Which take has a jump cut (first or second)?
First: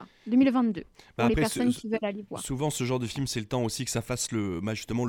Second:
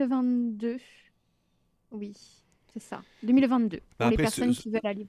second